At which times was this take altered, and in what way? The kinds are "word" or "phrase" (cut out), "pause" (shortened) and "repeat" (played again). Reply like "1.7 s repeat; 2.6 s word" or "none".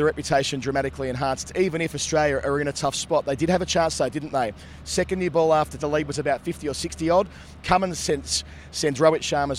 5.8 s word